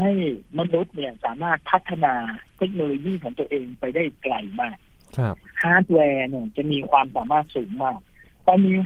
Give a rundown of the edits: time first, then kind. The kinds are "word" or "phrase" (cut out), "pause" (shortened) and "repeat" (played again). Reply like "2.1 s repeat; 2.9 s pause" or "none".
none